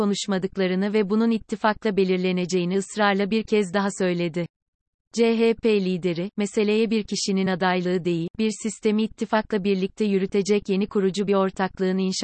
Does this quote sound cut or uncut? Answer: uncut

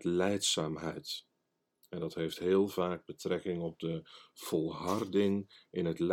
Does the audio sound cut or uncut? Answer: uncut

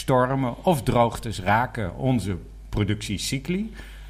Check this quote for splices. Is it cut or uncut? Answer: uncut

